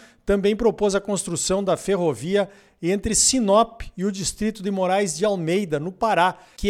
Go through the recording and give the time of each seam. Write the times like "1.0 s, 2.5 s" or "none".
none